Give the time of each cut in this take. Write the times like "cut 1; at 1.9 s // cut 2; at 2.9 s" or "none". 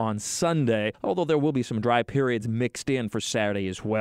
none